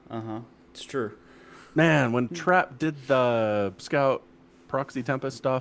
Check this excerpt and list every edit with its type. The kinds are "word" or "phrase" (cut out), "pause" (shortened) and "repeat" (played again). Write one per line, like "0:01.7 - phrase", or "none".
0:03.8 - word

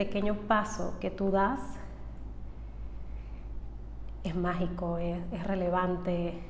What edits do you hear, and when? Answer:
none

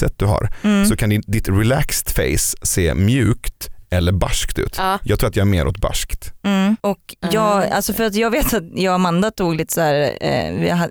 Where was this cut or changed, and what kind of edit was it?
0:06.8 - pause

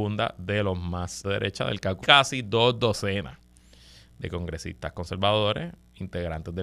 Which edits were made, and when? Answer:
0:01.2 - word
0:02.0 - phrase

